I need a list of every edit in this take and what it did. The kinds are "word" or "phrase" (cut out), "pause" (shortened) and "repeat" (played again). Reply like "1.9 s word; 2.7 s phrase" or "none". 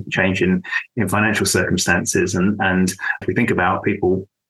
3.2 s word